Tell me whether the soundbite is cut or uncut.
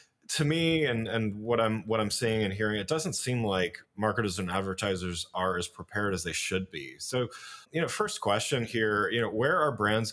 cut